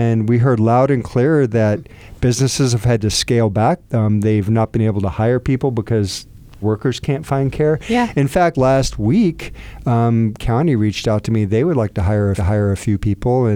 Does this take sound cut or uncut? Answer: cut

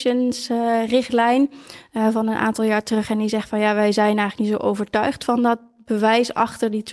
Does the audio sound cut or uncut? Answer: uncut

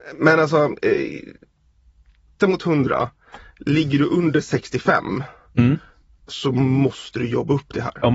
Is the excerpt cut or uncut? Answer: cut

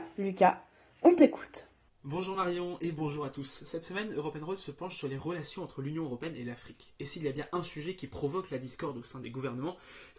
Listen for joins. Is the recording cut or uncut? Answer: uncut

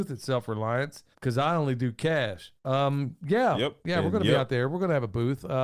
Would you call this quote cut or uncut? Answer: cut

